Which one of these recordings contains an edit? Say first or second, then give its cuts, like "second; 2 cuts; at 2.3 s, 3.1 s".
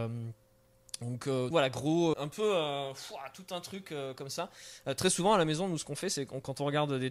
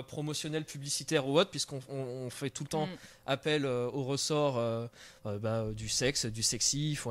first; 2 cuts; at 1.5 s, 2.1 s